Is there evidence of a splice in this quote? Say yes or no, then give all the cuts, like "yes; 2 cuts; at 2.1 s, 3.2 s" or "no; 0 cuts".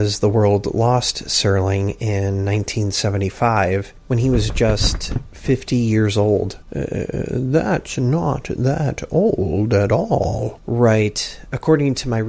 no; 0 cuts